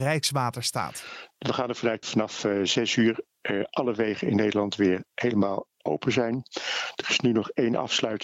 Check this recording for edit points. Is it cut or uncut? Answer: cut